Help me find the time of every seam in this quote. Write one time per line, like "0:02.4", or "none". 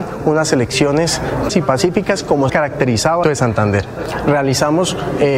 0:01.5
0:02.5
0:03.2